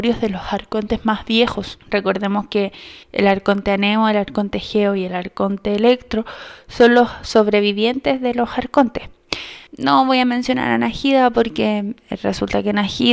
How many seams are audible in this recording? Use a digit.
3